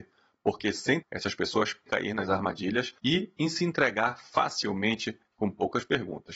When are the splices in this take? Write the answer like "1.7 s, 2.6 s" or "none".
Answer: 1.0 s, 1.9 s, 3.0 s